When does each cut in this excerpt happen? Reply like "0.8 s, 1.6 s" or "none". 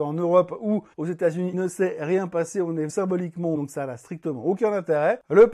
0.9 s, 1.5 s, 2.9 s, 3.5 s